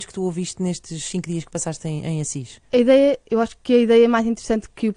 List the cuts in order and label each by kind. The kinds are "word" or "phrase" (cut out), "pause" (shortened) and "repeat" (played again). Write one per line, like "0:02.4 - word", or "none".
0:02.6 - pause